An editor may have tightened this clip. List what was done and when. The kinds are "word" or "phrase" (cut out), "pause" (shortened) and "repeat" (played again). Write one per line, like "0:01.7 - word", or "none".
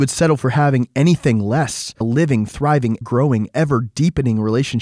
0:02.0 - word
0:03.0 - word